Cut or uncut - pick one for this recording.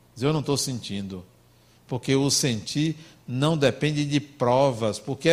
uncut